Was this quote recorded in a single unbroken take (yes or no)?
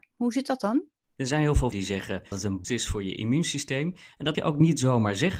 no